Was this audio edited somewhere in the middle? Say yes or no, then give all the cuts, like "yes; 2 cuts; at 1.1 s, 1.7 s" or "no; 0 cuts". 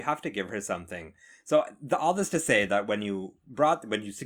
no; 0 cuts